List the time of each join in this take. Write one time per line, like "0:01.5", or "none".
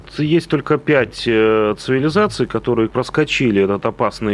0:02.9